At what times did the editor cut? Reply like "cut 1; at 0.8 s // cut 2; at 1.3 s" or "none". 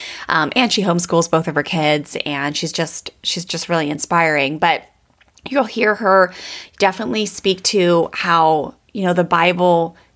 none